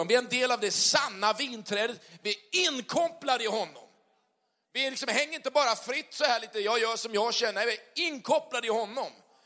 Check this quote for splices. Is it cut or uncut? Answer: uncut